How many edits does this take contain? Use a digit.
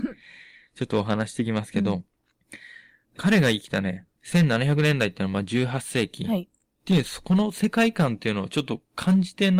1